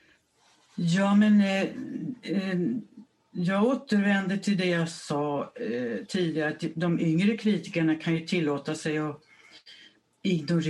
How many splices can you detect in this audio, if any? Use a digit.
0